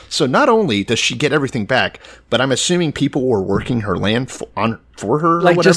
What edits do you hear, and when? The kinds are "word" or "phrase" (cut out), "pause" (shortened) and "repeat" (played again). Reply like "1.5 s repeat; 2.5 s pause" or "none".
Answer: none